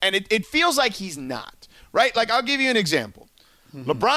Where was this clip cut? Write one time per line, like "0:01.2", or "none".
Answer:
none